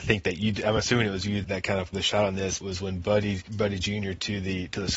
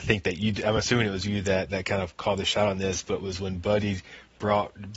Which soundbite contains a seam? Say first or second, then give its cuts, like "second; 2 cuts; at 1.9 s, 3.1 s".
first; 4 cuts; at 1.4 s, 1.9 s, 2.6 s, 3.5 s